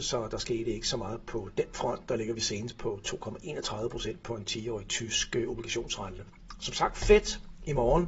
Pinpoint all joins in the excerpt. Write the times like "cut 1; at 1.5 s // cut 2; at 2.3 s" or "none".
none